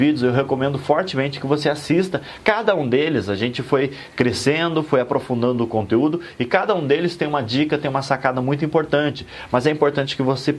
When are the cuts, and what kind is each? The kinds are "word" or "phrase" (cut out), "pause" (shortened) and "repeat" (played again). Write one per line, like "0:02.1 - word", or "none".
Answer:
none